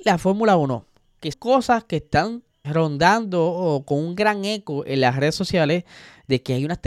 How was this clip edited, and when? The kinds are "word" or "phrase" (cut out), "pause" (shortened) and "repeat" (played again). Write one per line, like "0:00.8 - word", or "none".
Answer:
0:01.3 - word
0:02.6 - word

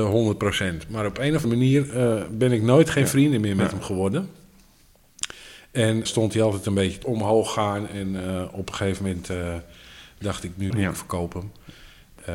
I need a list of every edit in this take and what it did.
0:01.4 - word
0:06.1 - word
0:07.0 - phrase
0:10.7 - phrase

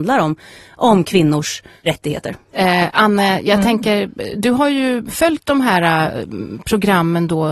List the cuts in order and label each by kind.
0:02.4 - pause

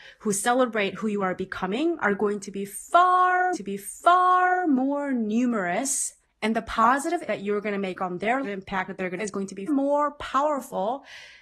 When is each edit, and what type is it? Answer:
0:03.5 - repeat
0:06.2 - pause
0:07.3 - word
0:08.4 - phrase
0:09.2 - phrase
0:09.7 - word

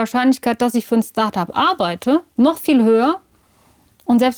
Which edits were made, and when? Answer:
0:02.3 - pause

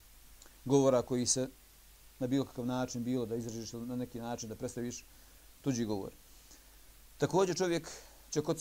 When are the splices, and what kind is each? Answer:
none

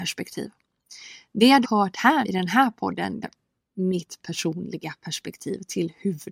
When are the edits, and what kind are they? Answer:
0:01.6 - word
0:02.2 - word
0:03.2 - word

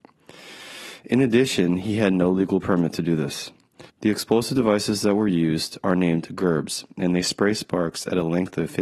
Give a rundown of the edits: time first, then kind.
0:03.9 - pause

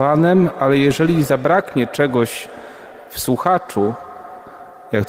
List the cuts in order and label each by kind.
none

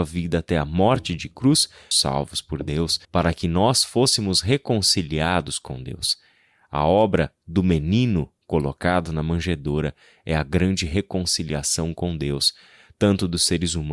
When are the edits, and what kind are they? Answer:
0:01.9 - phrase
0:03.0 - pause

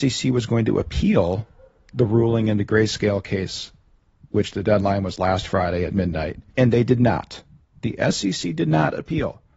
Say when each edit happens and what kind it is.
0:06.5 - pause

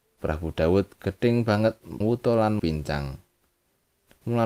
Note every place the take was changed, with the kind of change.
0:02.0 - phrase
0:02.6 - word

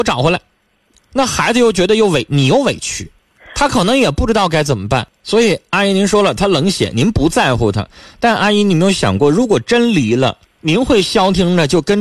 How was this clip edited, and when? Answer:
0:10.4 - pause

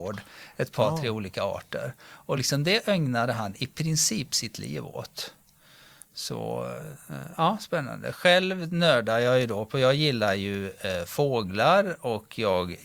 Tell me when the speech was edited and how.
none

